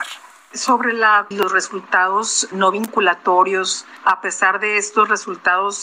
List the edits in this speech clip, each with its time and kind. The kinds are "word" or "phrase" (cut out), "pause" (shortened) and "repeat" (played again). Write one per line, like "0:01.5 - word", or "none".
0:01.3 - phrase
0:02.5 - word